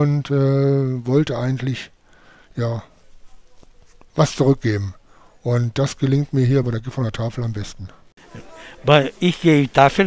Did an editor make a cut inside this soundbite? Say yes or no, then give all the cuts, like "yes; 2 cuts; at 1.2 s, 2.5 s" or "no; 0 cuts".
no; 0 cuts